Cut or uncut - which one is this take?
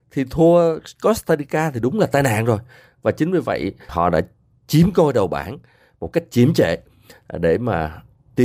uncut